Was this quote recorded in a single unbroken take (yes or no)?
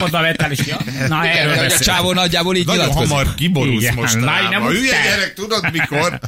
yes